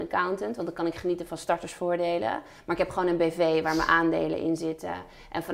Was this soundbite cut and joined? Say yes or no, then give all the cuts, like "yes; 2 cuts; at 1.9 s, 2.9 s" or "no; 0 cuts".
no; 0 cuts